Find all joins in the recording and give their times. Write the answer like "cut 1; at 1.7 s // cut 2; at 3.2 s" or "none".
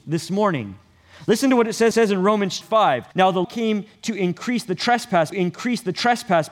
cut 1; at 1.9 s // cut 2; at 2.6 s // cut 3; at 3.1 s // cut 4; at 3.4 s // cut 5; at 5.3 s

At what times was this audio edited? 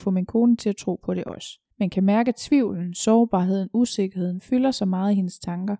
cut 1; at 1.7 s

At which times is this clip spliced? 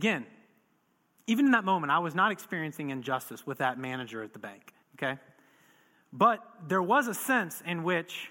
cut 1; at 4.8 s

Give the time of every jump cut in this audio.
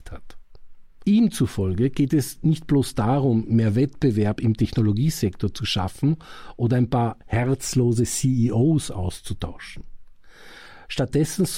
none

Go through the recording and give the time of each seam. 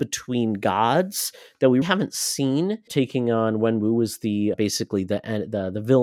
cut 1; at 1.8 s // cut 2; at 2.9 s // cut 3; at 4.5 s

